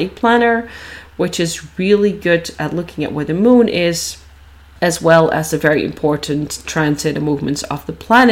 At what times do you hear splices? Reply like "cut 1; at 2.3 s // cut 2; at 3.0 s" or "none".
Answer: none